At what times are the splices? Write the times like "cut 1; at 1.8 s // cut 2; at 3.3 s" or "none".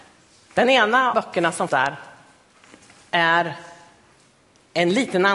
cut 1; at 1.1 s // cut 2; at 1.7 s